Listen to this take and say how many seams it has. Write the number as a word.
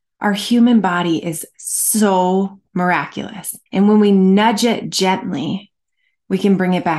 one